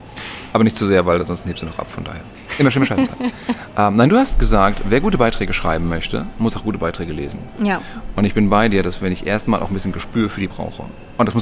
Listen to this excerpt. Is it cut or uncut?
cut